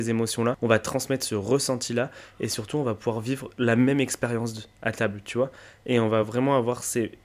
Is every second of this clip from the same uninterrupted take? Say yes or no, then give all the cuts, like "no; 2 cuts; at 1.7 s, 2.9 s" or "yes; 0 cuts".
yes; 0 cuts